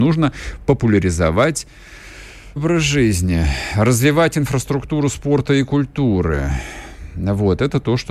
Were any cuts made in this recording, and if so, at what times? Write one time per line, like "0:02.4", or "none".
0:02.6